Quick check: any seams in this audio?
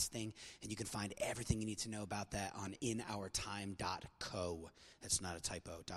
yes; 1 cut; at 2.8 s

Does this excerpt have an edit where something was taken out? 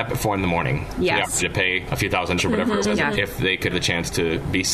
yes; 6 cuts; at 1.4 s, 1.9 s, 2.4 s, 2.8 s, 3.1 s, 3.7 s

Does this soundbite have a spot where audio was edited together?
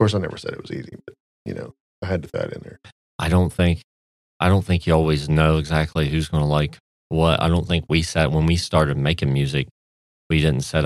no; 0 cuts

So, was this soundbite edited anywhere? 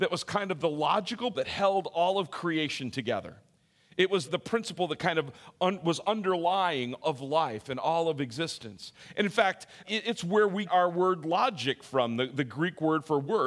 yes; 5 cuts; at 1.3 s, 4.3 s, 7.0 s, 9.8 s, 10.6 s

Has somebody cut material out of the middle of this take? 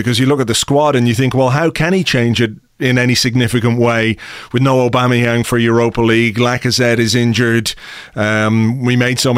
no; 0 cuts

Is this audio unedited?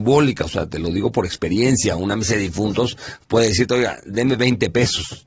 yes; 0 cuts

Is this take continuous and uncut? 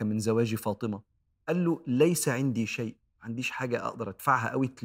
yes; 0 cuts

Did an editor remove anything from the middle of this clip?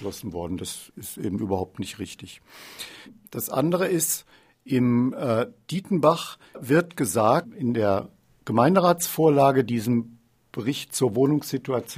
no; 0 cuts

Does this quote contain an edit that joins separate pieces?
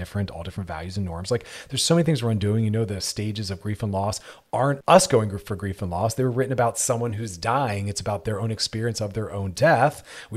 yes; 1 cut; at 4.8 s

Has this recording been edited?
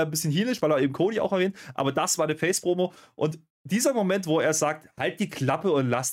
no; 0 cuts

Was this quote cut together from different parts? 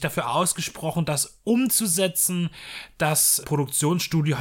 yes; 1 cut; at 3.4 s

